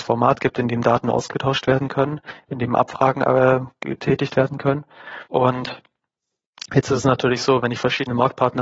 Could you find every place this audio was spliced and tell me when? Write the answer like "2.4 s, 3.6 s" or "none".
5.3 s